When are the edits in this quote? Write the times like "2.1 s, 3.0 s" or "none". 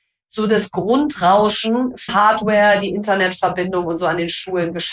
2.1 s

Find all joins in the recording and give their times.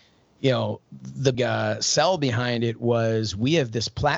1.3 s

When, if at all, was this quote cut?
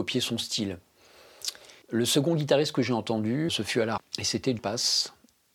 1.8 s, 3.5 s, 4.0 s, 4.6 s

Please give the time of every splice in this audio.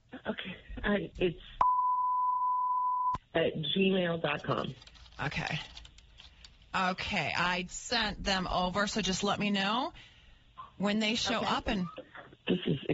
7.7 s

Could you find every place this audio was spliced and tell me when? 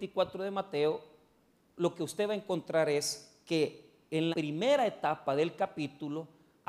4.3 s

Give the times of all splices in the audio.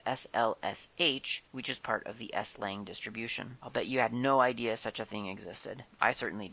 1.5 s

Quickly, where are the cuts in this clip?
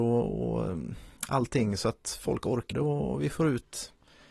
1.2 s, 2.7 s

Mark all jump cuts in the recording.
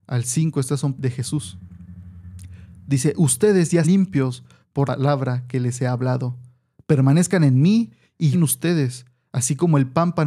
1.0 s, 3.8 s, 4.9 s, 8.3 s

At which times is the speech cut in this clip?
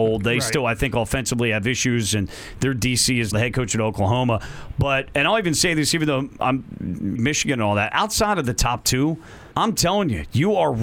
3.3 s, 7.2 s, 9.5 s

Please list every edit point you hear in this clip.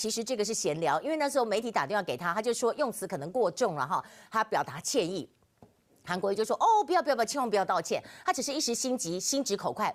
none

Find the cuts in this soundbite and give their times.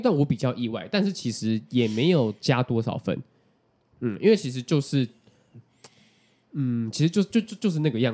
none

